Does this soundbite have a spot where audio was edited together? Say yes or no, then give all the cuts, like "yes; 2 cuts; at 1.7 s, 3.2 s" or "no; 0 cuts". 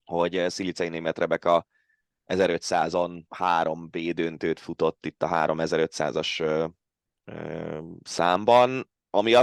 yes; 1 cut; at 3.3 s